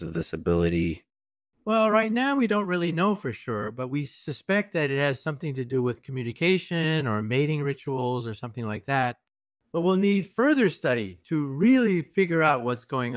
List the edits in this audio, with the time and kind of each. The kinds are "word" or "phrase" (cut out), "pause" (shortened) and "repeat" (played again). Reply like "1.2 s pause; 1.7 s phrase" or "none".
none